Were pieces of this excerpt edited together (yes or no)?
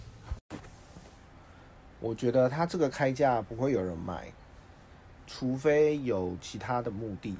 no